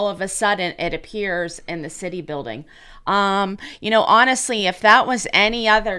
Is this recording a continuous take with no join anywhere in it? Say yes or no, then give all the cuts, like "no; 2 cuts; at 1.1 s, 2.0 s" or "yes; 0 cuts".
yes; 0 cuts